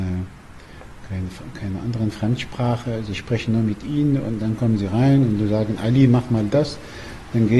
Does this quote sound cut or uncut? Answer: uncut